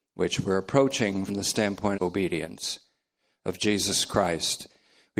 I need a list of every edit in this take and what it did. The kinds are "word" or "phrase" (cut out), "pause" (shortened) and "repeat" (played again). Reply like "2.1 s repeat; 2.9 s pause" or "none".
1.3 s word; 1.9 s phrase

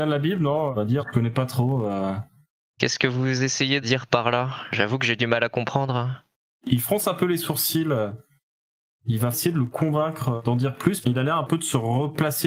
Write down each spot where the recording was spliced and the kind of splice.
1.0 s word; 3.8 s word; 9.3 s word; 11.0 s word

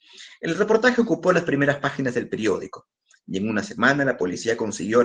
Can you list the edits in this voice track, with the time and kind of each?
none

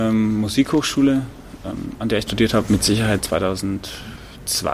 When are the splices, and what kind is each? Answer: 2.3 s word; 3.2 s word

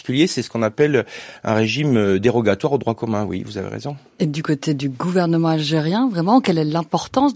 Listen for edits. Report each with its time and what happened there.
none

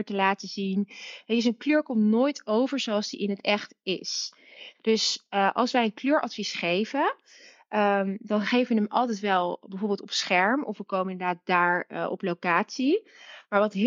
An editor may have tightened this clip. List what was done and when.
none

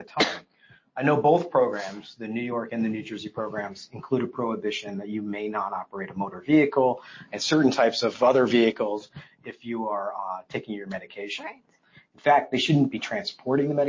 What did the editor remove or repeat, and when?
none

